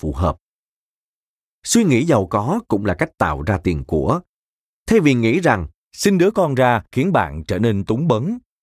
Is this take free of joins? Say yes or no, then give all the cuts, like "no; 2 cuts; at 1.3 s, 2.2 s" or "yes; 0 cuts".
yes; 0 cuts